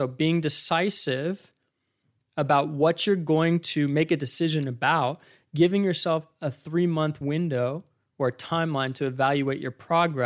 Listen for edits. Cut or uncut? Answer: uncut